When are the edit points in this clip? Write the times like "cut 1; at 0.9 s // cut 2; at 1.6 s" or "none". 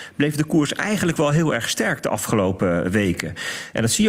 none